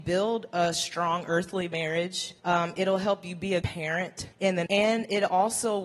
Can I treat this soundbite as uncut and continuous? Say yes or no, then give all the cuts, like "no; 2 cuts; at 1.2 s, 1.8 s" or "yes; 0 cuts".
no; 4 cuts; at 2.4 s, 3.6 s, 4.3 s, 4.7 s